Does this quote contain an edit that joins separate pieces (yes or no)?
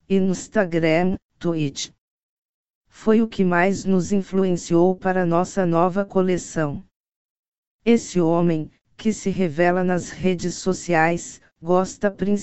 no